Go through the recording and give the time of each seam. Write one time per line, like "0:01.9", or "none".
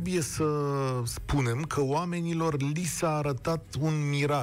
none